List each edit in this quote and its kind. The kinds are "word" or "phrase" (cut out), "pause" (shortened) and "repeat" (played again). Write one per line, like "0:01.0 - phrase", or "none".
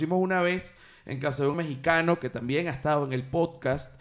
0:01.5 - word